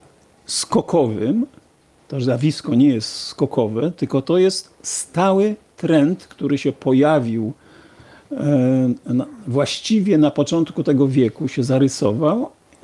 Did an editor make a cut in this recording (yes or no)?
no